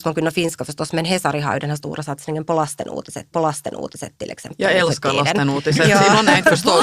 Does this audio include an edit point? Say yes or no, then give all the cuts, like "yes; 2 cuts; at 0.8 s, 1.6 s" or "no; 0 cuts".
yes; 1 cut; at 3.3 s